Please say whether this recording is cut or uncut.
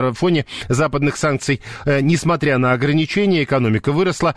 uncut